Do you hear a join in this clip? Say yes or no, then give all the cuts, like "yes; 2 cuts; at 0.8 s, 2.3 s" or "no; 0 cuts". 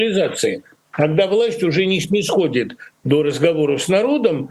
no; 0 cuts